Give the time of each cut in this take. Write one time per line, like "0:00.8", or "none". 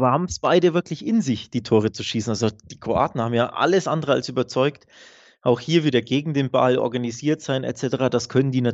none